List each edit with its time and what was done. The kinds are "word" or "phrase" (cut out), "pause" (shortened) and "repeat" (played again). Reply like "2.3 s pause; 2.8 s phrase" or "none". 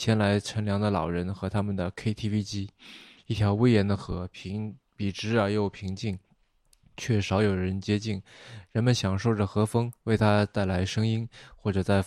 none